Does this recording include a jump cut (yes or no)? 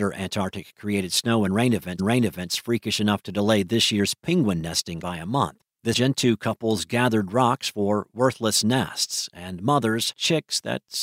yes